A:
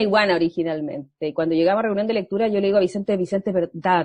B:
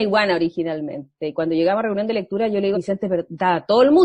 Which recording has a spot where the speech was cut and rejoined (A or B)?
B